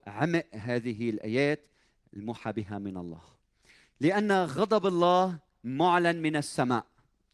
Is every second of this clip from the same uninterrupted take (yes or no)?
yes